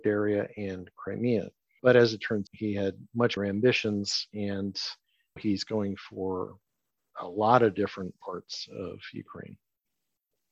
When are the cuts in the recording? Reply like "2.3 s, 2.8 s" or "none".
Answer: 1.8 s, 2.5 s, 3.4 s, 5.4 s